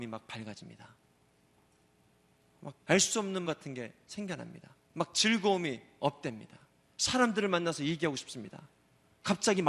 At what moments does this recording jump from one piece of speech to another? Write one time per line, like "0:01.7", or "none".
0:02.8
0:03.4
0:04.8
0:06.0
0:06.8